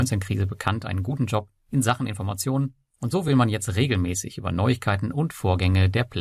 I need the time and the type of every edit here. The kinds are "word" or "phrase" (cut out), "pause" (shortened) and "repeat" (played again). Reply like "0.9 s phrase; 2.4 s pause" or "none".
none